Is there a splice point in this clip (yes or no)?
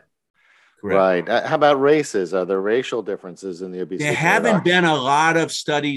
no